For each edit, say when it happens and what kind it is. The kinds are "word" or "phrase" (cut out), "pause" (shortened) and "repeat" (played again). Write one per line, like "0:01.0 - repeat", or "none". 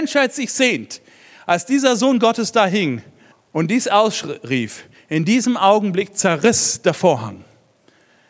0:03.3 - pause